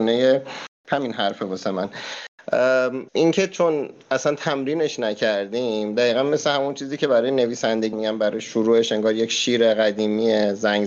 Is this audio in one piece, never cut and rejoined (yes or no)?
no